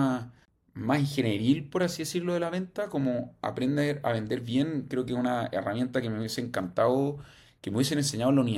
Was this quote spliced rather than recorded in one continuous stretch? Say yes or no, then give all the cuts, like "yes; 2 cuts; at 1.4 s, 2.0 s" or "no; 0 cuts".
no; 0 cuts